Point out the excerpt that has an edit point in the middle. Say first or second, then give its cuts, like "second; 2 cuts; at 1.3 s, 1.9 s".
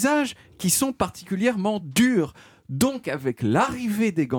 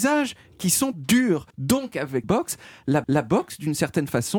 second; 4 cuts; at 0.9 s, 1.5 s, 2.2 s, 3.0 s